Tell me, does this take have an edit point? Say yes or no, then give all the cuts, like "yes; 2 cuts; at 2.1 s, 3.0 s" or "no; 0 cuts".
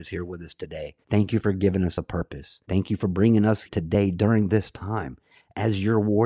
yes; 3 cuts; at 1.0 s, 2.6 s, 3.7 s